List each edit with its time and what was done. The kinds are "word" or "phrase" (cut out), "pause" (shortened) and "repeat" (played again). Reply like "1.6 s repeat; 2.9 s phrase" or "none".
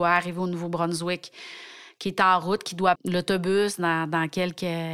3.0 s word